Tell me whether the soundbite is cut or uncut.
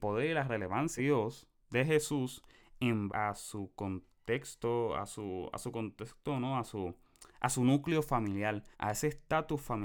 cut